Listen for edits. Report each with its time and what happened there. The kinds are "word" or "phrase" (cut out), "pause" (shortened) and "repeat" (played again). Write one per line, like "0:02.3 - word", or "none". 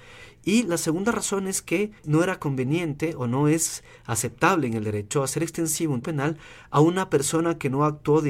0:02.0 - pause
0:06.0 - word